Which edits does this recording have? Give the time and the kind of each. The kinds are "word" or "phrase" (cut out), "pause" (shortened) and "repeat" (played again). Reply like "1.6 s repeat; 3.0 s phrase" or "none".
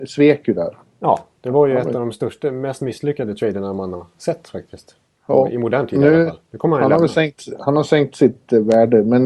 5.1 s pause